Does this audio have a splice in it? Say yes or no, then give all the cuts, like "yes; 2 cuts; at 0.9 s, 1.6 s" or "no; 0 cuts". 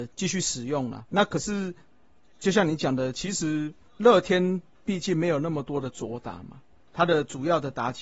yes; 1 cut; at 1.1 s